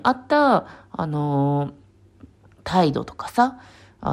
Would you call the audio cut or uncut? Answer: cut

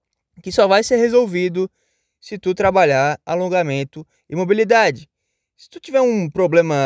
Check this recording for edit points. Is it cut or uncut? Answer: uncut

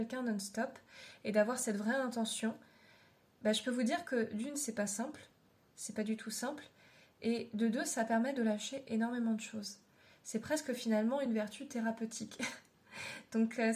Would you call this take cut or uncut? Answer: uncut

